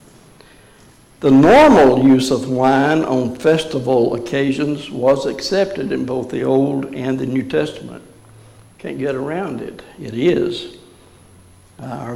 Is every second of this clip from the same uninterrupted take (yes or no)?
yes